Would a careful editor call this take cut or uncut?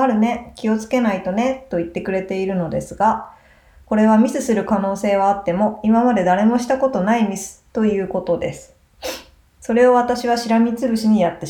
uncut